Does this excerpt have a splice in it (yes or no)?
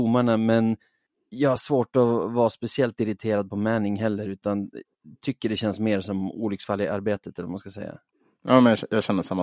no